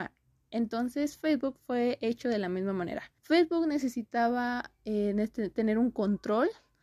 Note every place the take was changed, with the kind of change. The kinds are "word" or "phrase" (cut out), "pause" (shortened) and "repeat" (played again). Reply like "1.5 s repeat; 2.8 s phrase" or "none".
3.2 s pause